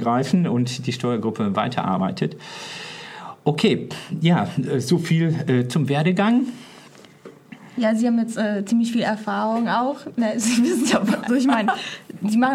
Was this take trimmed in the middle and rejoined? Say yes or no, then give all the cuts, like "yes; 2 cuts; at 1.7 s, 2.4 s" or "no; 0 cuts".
yes; 1 cut; at 11.3 s